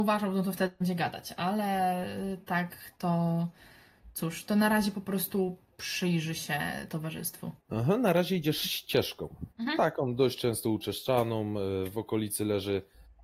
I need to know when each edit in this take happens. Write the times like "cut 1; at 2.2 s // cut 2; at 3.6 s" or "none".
cut 1; at 7.6 s // cut 2; at 9.5 s